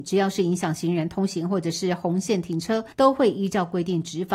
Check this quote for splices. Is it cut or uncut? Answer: cut